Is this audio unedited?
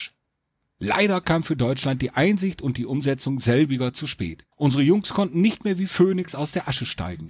no; 1 cut; at 4.5 s

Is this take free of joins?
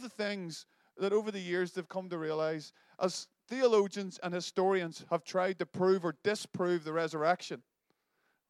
yes; 0 cuts

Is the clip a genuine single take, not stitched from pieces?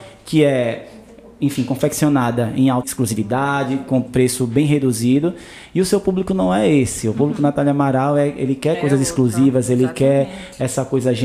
no; 2 cuts; at 2.8 s, 4.1 s

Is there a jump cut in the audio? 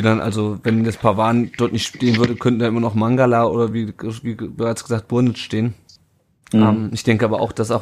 no; 0 cuts

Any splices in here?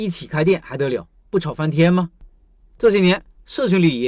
no; 0 cuts

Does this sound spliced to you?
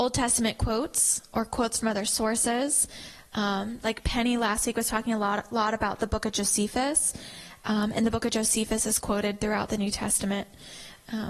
no; 0 cuts

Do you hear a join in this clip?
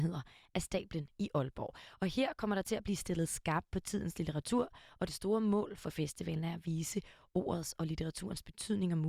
no; 0 cuts

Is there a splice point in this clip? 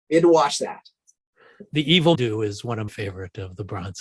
yes; 2 cuts; at 2.1 s, 2.9 s

